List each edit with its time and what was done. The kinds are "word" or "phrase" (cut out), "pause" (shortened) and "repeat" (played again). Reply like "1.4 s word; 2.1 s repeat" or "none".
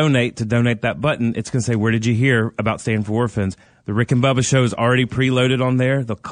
none